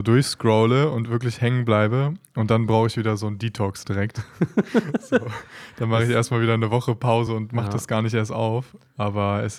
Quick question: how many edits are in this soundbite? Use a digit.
0